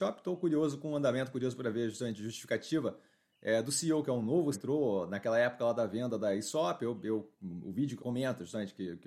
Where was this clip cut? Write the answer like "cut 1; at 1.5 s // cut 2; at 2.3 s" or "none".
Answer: cut 1; at 4.5 s // cut 2; at 7.3 s // cut 3; at 8.0 s

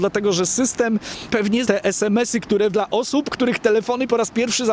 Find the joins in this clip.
cut 1; at 1.3 s // cut 2; at 1.6 s // cut 3; at 2.7 s

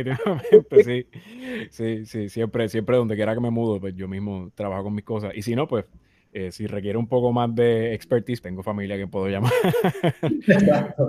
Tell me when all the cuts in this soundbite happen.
cut 1; at 8.4 s

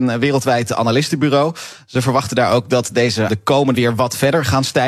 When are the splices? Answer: cut 1; at 3.3 s // cut 2; at 3.7 s

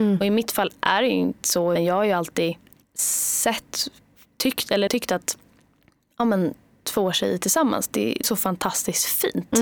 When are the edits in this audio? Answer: cut 1; at 1.4 s // cut 2; at 1.8 s // cut 3; at 2.8 s // cut 4; at 4.9 s // cut 5; at 8.2 s

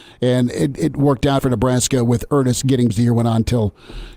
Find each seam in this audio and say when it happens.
cut 1; at 1.4 s // cut 2; at 2.9 s

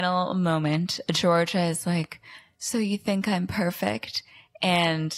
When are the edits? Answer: none

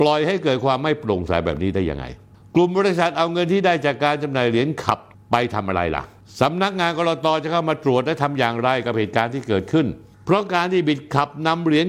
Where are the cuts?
none

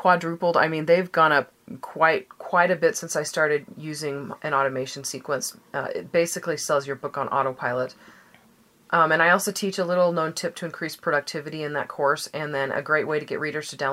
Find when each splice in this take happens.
none

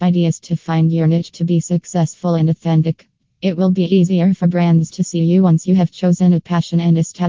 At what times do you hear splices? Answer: none

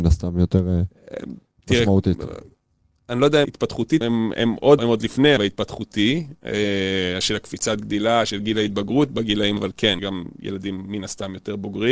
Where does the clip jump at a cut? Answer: cut 1; at 3.4 s // cut 2; at 4.0 s // cut 3; at 4.8 s // cut 4; at 5.4 s // cut 5; at 9.6 s // cut 6; at 10.0 s

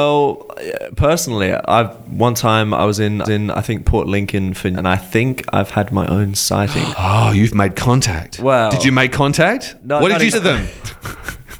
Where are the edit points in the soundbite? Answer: cut 1; at 3.2 s // cut 2; at 4.7 s // cut 3; at 6.9 s // cut 4; at 10.3 s

